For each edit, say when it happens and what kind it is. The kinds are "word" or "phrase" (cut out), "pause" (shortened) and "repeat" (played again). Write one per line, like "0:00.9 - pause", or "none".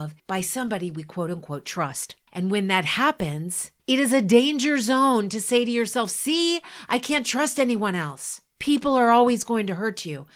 none